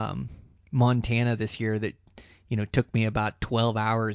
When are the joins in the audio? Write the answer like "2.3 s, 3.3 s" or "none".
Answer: none

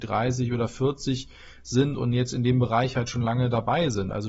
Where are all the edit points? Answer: none

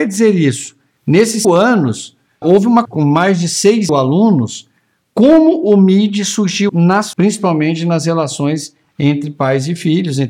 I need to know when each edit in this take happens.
1.4 s, 2.4 s, 2.8 s, 3.9 s, 6.7 s, 7.1 s

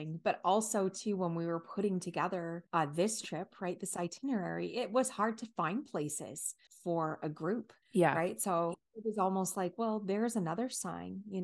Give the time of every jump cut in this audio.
2.7 s, 6.7 s, 7.8 s

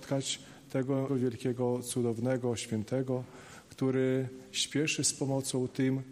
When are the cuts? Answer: 1.1 s

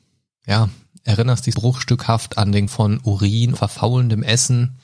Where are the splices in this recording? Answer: 1.5 s, 2.7 s, 3.6 s

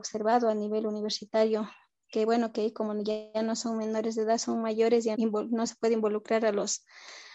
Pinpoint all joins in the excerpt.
5.1 s

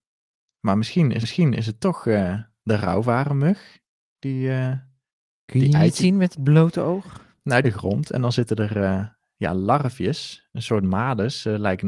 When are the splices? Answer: 1.2 s, 7.6 s

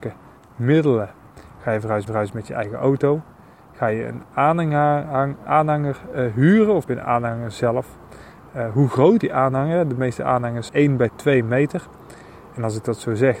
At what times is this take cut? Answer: 2.1 s, 5.5 s, 6.8 s, 9.2 s, 10.7 s

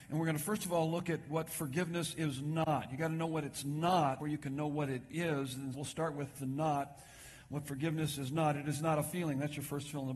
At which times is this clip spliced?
4.2 s, 5.7 s

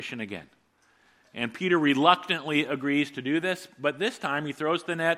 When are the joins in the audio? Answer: none

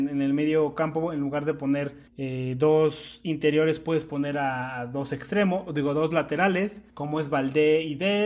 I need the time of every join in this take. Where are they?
2.1 s, 6.9 s

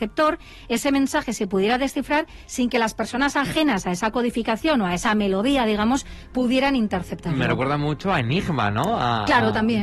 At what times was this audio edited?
none

